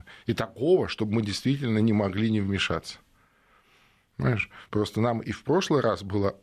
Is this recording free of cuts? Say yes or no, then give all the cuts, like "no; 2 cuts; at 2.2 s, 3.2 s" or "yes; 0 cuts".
yes; 0 cuts